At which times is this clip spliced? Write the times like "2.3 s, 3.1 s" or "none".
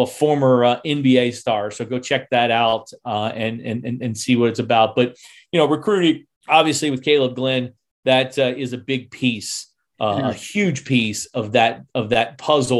6.4 s